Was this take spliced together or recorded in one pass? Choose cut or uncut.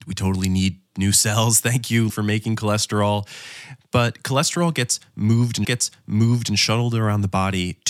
cut